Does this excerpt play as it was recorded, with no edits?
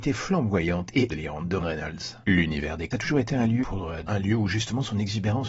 no; 5 cuts; at 1.1 s, 1.6 s, 2.9 s, 3.6 s, 4.1 s

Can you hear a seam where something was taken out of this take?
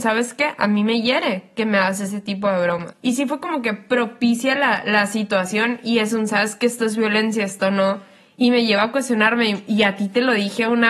no; 0 cuts

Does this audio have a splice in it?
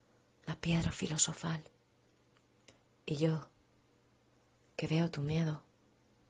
no; 0 cuts

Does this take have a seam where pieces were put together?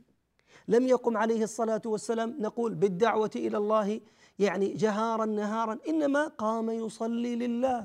no; 0 cuts

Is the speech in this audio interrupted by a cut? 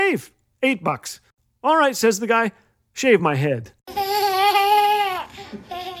no; 0 cuts

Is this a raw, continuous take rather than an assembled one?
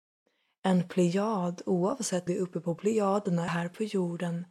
no; 2 cuts; at 2.3 s, 3.5 s

